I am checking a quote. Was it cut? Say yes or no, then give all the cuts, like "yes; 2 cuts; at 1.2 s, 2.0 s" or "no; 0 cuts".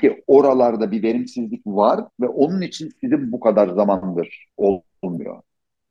yes; 2 cuts; at 2.1 s, 4.5 s